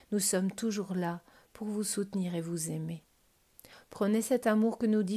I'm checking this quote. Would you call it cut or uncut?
uncut